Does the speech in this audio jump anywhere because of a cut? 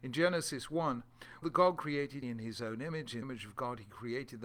yes; 3 cuts; at 1.4 s, 2.2 s, 3.2 s

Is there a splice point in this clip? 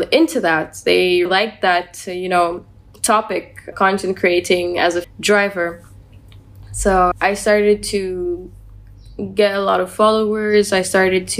yes; 4 cuts; at 1.3 s, 3.7 s, 5.0 s, 7.1 s

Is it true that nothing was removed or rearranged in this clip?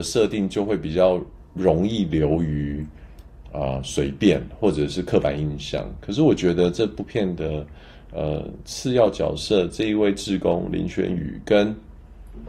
no; 1 cut; at 1.5 s

